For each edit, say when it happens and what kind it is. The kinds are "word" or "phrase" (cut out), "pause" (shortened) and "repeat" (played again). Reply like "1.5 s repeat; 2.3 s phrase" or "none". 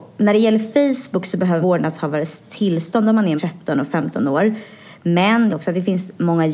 1.6 s word; 3.4 s word; 5.5 s phrase